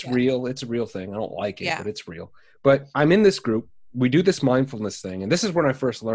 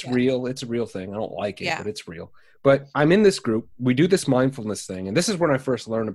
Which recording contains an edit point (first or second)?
second